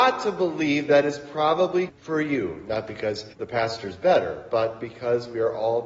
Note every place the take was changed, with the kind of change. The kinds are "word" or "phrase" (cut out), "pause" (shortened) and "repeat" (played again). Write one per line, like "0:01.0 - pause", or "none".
0:01.9 - word
0:03.3 - pause